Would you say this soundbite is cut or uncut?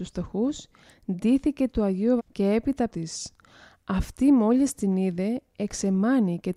cut